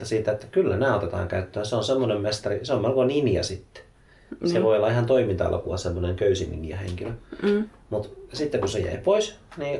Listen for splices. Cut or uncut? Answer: uncut